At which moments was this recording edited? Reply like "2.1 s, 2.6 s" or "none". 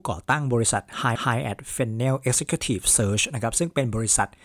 1.2 s

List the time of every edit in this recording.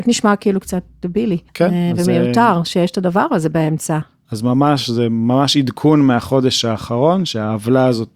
1.5 s

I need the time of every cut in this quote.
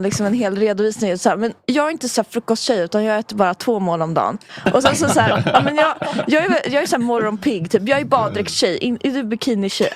none

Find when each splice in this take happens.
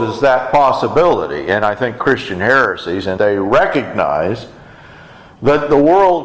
2.0 s, 3.2 s

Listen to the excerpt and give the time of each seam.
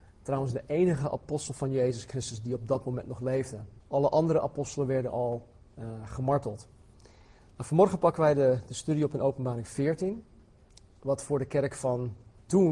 3.8 s

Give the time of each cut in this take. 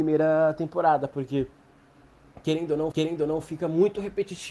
2.9 s

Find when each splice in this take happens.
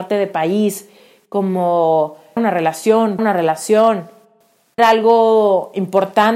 2.4 s, 3.2 s, 4.8 s

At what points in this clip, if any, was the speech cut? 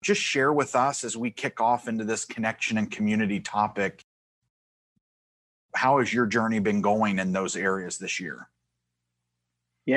none

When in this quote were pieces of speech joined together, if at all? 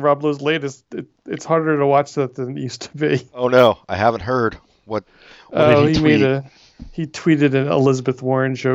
none

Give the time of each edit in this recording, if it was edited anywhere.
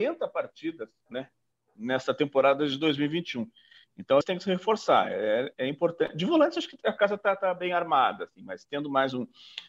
1.1 s, 4.2 s

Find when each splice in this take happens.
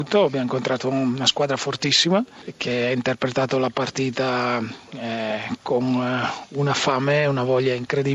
none

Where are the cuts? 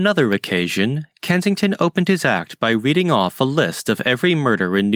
none

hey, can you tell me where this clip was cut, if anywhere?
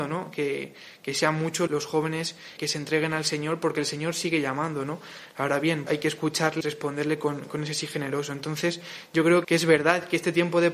1.7 s, 2.6 s, 5.9 s, 6.6 s, 9.4 s

